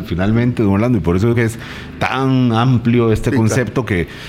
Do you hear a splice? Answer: yes; 1 cut; at 1.3 s

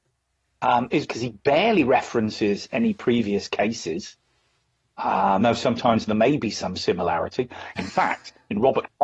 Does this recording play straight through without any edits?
no; 2 cuts; at 1.1 s, 5.4 s

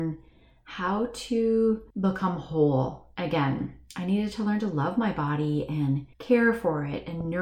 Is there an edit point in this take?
yes; 2 cuts; at 1.9 s, 6.1 s

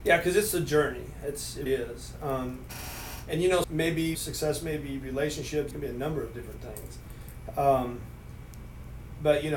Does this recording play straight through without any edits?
no; 4 cuts; at 1.7 s, 3.6 s, 4.1 s, 5.7 s

